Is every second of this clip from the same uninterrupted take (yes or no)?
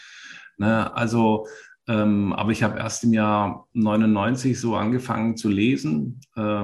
yes